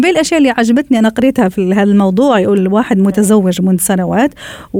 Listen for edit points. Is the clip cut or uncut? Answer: uncut